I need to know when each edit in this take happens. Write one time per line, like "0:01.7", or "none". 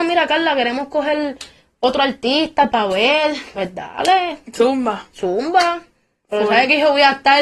none